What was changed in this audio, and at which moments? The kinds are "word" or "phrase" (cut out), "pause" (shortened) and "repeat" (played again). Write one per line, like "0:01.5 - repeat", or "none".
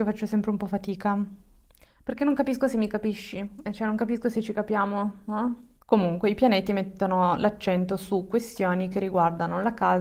none